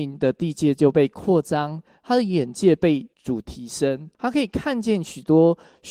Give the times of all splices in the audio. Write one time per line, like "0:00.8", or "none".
0:03.1
0:04.1

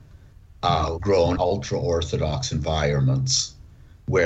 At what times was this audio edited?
0:01.0
0:01.4

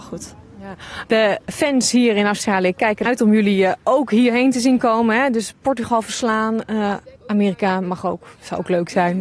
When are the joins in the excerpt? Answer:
0:03.1
0:07.2

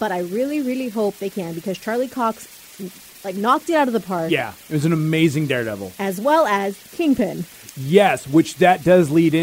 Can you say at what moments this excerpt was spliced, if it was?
none

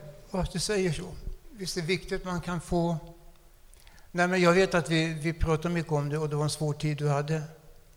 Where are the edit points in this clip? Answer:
none

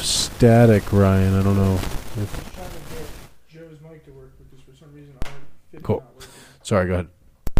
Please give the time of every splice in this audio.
0:05.8

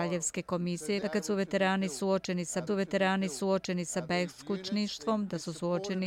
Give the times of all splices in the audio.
0:01.0
0:02.7

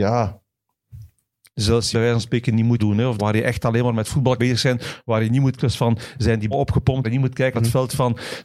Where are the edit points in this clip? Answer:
0:01.9
0:02.8
0:03.2
0:04.4
0:05.6
0:06.5
0:07.0
0:07.5

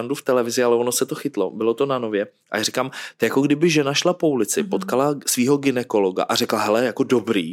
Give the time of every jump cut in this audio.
none

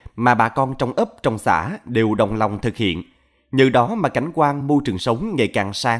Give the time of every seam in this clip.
none

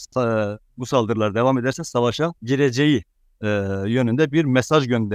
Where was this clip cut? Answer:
0:02.4

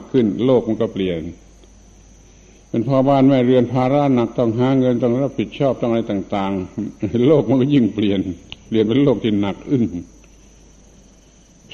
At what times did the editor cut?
none

